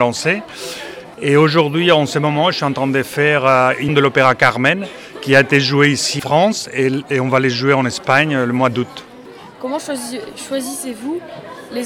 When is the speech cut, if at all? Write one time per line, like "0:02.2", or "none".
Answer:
0:03.9
0:06.2